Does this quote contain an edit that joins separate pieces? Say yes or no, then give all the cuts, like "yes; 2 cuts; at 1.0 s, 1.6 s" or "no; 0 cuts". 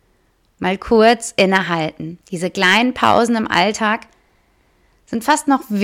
yes; 1 cut; at 2.2 s